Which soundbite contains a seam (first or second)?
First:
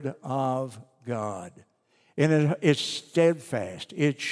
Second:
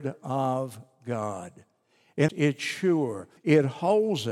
second